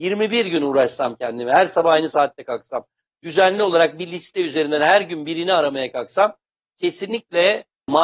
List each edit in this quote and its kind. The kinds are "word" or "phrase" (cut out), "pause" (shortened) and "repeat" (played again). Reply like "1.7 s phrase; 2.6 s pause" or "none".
none